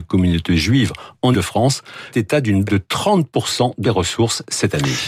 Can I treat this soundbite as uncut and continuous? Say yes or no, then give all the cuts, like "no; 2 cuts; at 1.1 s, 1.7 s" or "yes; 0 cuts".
no; 4 cuts; at 1.3 s, 2.1 s, 2.7 s, 3.8 s